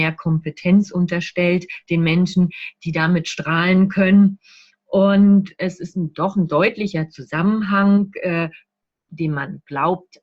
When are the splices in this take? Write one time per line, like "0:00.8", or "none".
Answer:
none